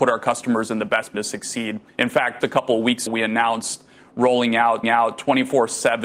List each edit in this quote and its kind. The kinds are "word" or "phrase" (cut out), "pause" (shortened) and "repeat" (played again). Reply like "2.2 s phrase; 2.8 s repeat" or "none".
1.1 s phrase; 1.9 s pause; 2.4 s word; 3.1 s word; 4.8 s repeat